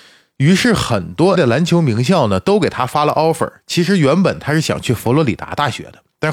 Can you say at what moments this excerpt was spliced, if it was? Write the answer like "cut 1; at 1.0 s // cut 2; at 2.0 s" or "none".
cut 1; at 1.3 s